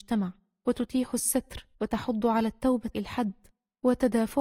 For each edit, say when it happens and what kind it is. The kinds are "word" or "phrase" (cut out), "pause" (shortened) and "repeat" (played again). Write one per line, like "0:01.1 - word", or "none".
0:01.7 - pause
0:02.9 - word